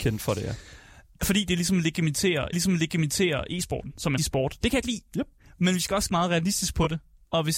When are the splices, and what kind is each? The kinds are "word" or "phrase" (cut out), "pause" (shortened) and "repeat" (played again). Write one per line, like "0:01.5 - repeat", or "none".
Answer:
0:02.5 - repeat
0:04.2 - phrase
0:04.8 - word
0:06.1 - word